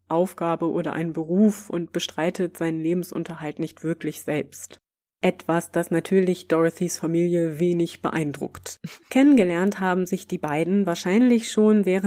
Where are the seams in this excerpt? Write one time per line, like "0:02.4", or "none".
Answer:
none